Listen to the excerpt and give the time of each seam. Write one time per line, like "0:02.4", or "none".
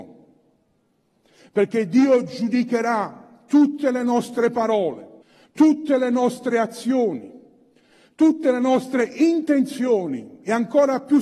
0:05.2

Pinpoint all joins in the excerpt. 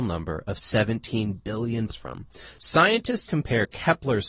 0:01.9
0:03.3

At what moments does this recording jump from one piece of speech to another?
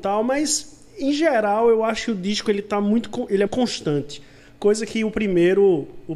0:03.5

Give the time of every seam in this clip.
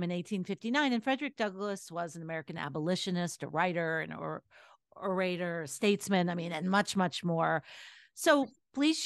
none

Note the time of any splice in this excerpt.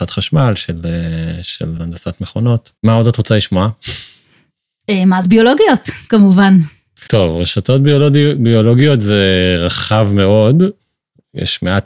0:01.8
0:02.8
0:05.2
0:07.1

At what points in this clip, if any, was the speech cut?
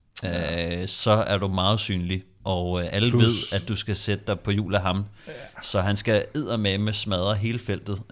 none

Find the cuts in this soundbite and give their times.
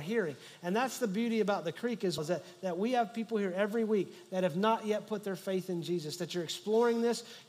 0:02.2

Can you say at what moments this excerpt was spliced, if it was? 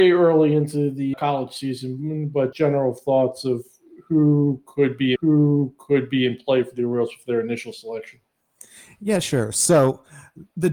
0:01.1
0:02.5
0:05.2

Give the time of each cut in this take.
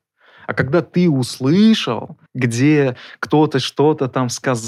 0:02.3

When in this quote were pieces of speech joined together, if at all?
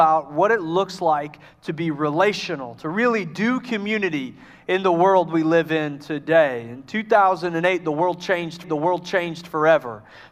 0:08.6

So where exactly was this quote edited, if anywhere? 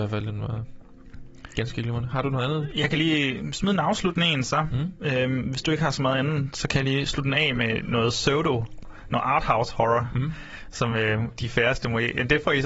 none

